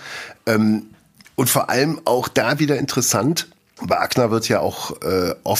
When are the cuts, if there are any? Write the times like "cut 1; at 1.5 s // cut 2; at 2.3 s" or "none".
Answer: none